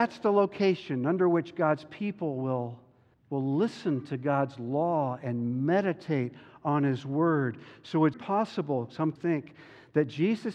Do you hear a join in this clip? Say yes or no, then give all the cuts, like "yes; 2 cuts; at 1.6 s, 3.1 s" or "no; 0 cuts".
yes; 3 cuts; at 3.1 s, 8.1 s, 9.2 s